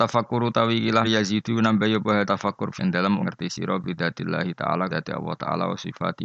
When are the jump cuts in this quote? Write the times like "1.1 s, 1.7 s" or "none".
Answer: 1.0 s, 2.2 s, 2.8 s, 3.2 s, 4.9 s